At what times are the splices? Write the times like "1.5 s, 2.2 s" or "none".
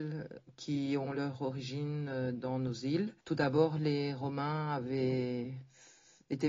3.2 s